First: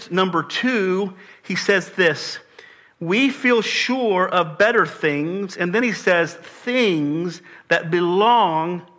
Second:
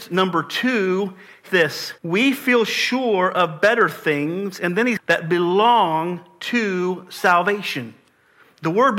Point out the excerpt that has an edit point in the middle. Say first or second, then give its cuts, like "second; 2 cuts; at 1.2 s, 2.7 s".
second; 3 cuts; at 1.5 s, 2.0 s, 5.0 s